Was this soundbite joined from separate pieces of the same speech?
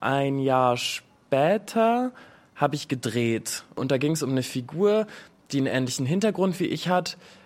no; 0 cuts

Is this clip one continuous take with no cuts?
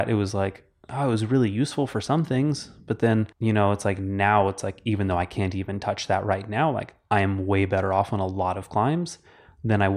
no; 1 cut; at 3.3 s

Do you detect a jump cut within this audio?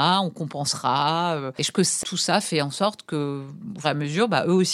yes; 2 cuts; at 1.7 s, 3.8 s

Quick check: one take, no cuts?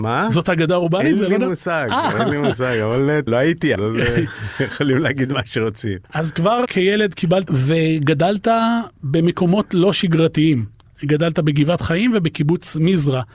no; 4 cuts; at 3.3 s, 3.8 s, 6.7 s, 7.5 s

